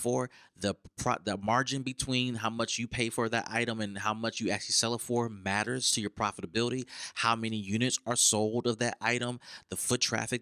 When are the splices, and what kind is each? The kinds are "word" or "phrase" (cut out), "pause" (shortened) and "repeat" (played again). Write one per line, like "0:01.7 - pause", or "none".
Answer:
none